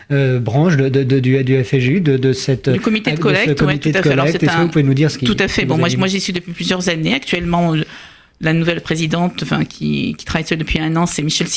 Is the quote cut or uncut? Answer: uncut